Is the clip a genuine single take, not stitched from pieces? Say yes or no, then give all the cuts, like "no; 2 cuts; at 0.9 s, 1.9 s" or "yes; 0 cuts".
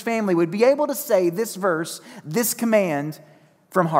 yes; 0 cuts